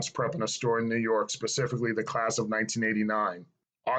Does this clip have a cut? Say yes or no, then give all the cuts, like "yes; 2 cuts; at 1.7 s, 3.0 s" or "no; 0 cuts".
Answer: no; 0 cuts